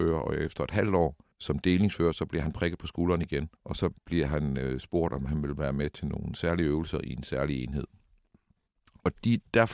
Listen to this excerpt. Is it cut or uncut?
cut